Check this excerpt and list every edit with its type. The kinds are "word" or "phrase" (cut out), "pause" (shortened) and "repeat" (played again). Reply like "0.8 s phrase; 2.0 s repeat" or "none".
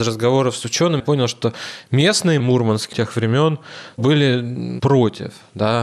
1.0 s word; 2.4 s word; 2.9 s word